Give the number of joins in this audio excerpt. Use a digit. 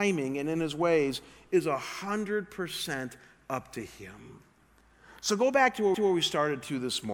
1